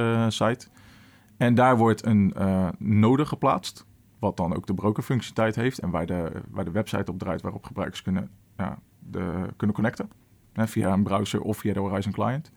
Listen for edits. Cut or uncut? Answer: uncut